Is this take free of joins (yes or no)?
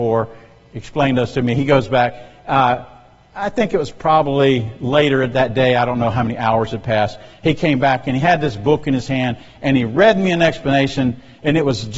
yes